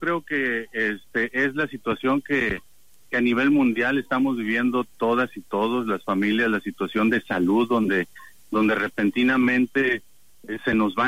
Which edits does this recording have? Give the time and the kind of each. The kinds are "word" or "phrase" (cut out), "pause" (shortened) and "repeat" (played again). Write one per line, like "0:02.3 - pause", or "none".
none

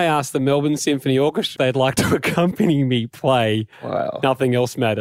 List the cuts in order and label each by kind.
0:01.6 - word
0:03.7 - pause

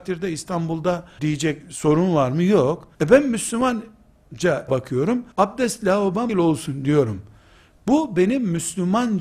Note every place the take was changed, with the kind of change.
0:01.2 - phrase
0:01.6 - word
0:02.9 - pause
0:04.7 - word
0:05.3 - pause
0:06.3 - word

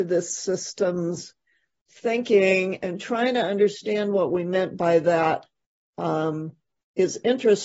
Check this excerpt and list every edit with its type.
none

